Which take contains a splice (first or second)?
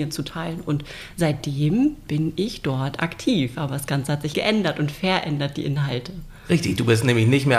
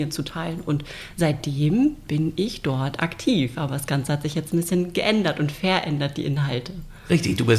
first